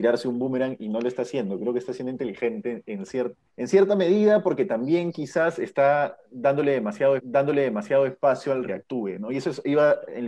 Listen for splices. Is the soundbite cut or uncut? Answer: cut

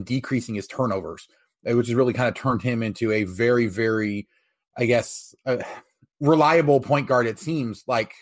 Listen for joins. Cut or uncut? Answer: uncut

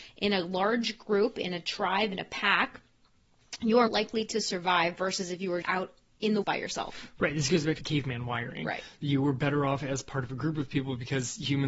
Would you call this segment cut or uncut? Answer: cut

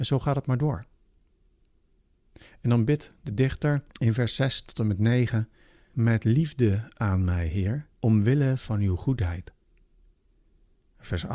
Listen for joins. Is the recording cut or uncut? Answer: cut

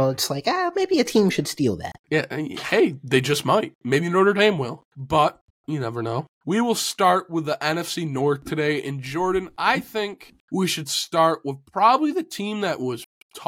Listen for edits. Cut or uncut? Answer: cut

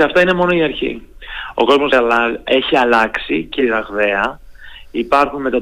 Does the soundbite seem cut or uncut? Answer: cut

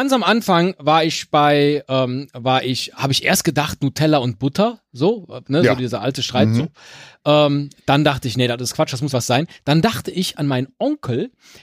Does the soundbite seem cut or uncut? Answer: cut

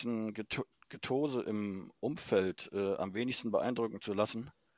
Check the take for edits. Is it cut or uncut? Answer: uncut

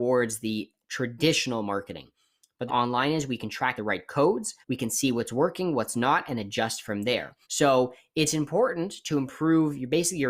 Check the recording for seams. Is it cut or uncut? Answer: cut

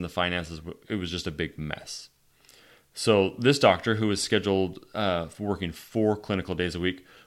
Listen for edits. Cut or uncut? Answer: uncut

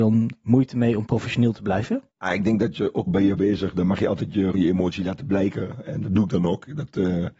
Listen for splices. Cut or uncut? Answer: cut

